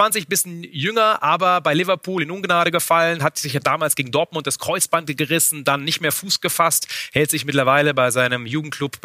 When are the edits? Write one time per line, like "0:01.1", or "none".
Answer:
none